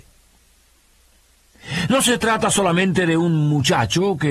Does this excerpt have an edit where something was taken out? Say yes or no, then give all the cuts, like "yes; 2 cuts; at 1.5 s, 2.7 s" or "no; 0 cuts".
no; 0 cuts